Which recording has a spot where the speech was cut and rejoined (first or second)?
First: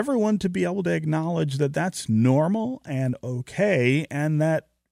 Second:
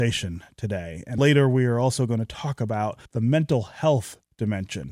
second